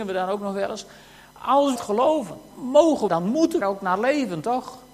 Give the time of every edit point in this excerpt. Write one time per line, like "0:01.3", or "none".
0:01.8
0:02.5
0:03.1
0:03.6